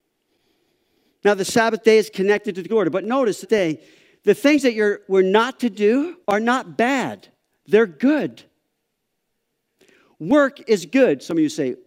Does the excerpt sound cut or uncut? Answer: cut